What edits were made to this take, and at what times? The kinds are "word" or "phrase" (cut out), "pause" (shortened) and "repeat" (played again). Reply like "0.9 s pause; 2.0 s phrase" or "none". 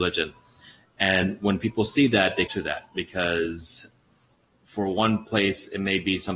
2.5 s word